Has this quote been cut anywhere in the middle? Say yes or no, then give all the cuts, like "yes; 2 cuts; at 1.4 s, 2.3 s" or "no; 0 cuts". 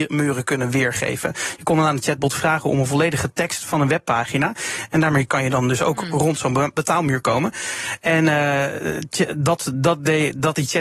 no; 0 cuts